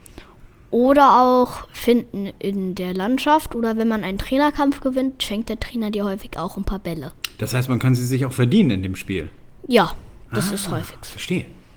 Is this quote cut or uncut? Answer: uncut